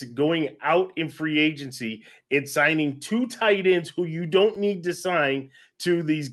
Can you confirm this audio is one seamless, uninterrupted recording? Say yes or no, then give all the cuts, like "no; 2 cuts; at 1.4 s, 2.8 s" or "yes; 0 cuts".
yes; 0 cuts